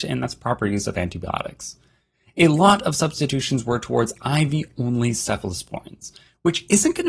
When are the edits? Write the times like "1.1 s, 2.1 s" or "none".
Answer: none